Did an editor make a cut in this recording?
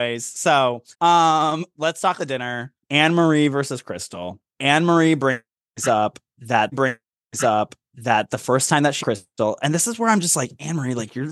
yes; 6 cuts; at 0.9 s, 2.2 s, 2.8 s, 4.5 s, 6.7 s, 9.0 s

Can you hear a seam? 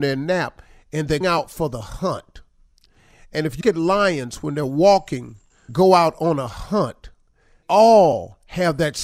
yes; 4 cuts; at 1.2 s, 3.6 s, 5.7 s, 7.6 s

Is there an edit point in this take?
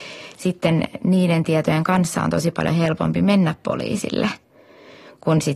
no; 0 cuts

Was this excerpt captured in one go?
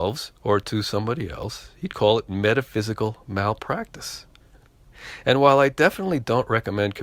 yes; 0 cuts

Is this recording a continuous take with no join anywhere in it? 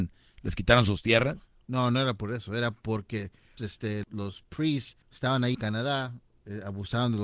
no; 4 cuts; at 3.6 s, 4.0 s, 5.0 s, 5.5 s

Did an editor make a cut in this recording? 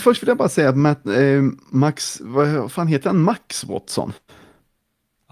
no; 0 cuts

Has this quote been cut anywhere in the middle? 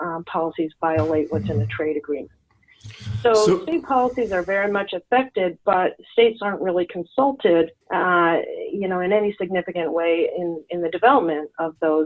yes; 1 cut; at 7.8 s

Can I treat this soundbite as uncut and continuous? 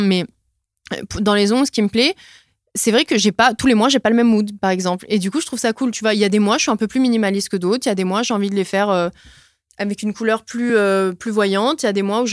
yes; 0 cuts

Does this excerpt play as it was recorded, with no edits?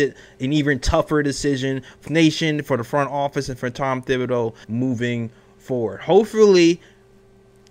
no; 2 cuts; at 2.1 s, 4.6 s

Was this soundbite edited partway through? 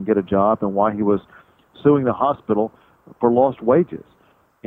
no; 0 cuts

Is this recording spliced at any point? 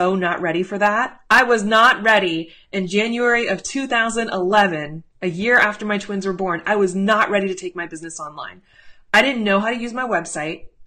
yes; 1 cut; at 5.1 s

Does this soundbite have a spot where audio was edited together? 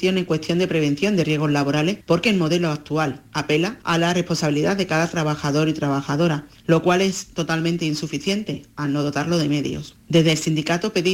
no; 0 cuts

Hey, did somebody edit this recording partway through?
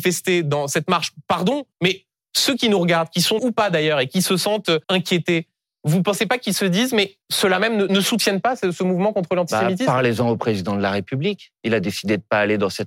yes; 5 cuts; at 1.7 s, 3.4 s, 4.8 s, 7.2 s, 7.9 s

